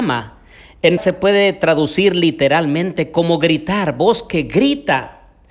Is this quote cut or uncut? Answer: cut